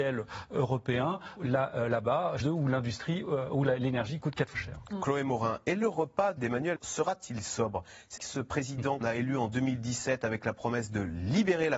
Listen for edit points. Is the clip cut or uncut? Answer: cut